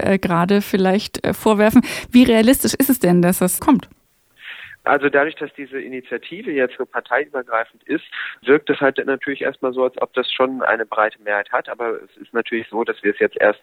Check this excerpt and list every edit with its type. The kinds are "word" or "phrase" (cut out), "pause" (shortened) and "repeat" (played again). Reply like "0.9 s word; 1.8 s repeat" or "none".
3.6 s word; 6.8 s word